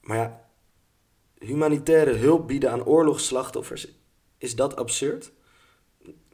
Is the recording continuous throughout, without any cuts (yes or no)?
yes